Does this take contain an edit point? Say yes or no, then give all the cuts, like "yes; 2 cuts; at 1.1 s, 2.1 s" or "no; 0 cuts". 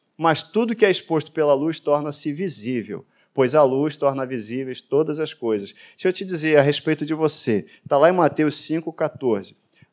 no; 0 cuts